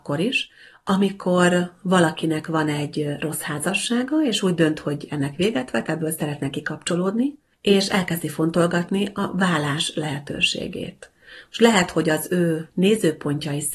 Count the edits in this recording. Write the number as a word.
one